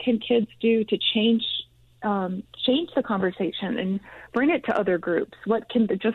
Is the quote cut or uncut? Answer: uncut